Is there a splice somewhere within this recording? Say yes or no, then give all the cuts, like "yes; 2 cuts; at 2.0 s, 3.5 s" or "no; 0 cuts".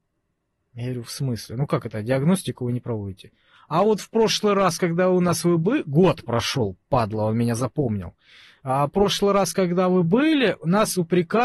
no; 0 cuts